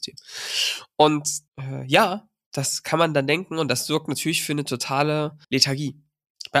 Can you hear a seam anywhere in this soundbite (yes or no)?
yes